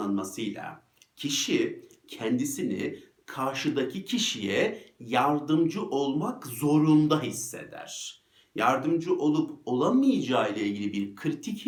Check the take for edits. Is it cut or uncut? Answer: uncut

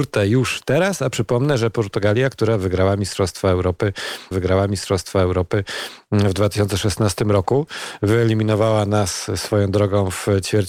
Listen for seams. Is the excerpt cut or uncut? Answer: cut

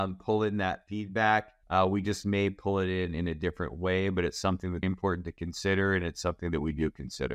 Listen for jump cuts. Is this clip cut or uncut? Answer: cut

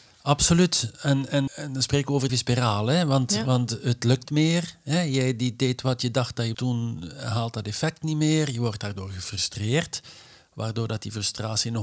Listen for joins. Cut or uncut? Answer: cut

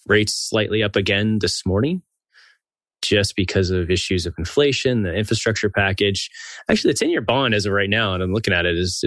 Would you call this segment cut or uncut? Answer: uncut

